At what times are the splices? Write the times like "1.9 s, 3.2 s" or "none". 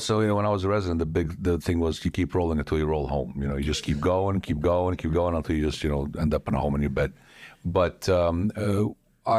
none